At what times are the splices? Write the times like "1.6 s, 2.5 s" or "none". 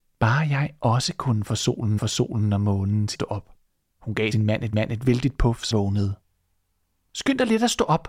2.0 s, 3.1 s, 3.7 s, 4.3 s, 4.7 s, 5.7 s